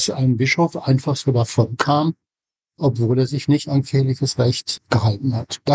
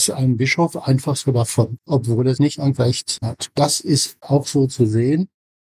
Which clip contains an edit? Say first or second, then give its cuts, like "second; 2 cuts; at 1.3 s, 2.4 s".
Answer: second; 5 cuts; at 1.8 s, 2.4 s, 2.8 s, 3.2 s, 4.2 s